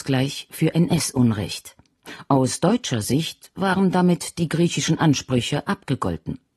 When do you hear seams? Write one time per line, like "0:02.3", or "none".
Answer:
none